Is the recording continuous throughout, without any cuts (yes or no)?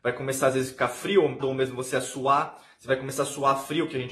no